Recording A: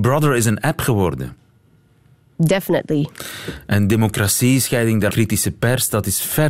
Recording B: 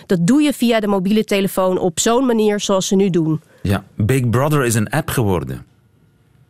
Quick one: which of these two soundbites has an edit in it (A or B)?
A